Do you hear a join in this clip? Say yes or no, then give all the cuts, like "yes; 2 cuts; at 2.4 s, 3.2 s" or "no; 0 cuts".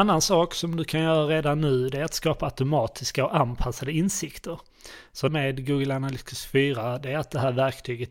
yes; 1 cut; at 5.3 s